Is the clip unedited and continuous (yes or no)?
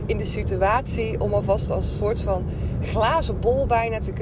yes